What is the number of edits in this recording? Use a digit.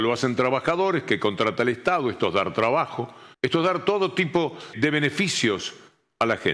2